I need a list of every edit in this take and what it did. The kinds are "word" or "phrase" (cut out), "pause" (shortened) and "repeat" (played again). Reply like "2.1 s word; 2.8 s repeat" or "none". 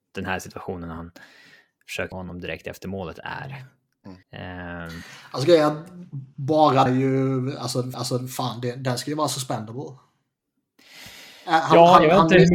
2.1 s word; 4.2 s pause; 6.9 s phrase; 7.9 s repeat